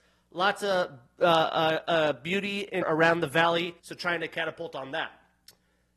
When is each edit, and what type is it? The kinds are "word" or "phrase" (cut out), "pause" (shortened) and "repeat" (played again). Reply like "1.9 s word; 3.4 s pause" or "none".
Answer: 2.8 s word; 3.8 s pause